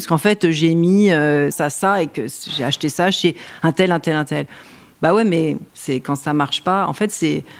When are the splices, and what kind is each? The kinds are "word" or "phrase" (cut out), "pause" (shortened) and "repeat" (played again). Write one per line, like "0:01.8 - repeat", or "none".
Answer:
0:01.5 - word
0:05.7 - pause